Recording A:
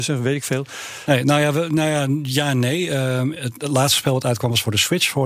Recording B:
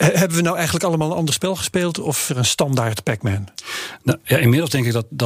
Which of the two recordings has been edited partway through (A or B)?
B